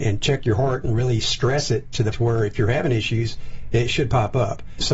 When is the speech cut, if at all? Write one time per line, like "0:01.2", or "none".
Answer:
0:02.1